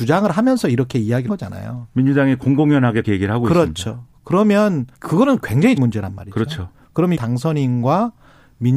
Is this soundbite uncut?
no; 5 cuts; at 1.3 s, 3.0 s, 4.9 s, 5.8 s, 7.2 s

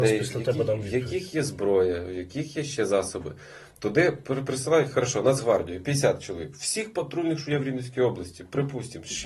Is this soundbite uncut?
yes; 0 cuts

